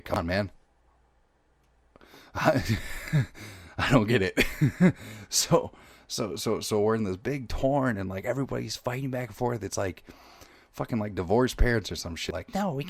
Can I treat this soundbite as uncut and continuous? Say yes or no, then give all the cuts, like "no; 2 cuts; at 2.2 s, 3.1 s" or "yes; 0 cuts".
yes; 0 cuts